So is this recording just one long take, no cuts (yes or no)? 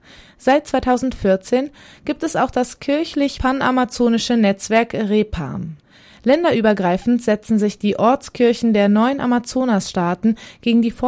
yes